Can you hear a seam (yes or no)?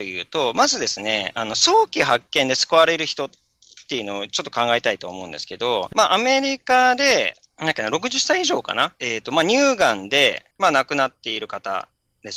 yes